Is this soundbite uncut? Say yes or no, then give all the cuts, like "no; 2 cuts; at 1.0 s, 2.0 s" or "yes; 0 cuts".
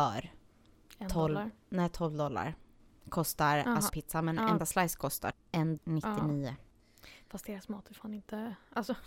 no; 4 cuts; at 3.9 s, 4.6 s, 5.3 s, 5.8 s